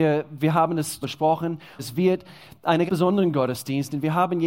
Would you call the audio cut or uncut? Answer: cut